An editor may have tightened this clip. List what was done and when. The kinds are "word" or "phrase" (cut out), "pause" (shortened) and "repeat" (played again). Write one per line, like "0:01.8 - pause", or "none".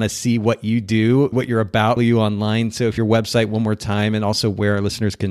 0:01.3 - word
0:02.0 - word
0:03.0 - phrase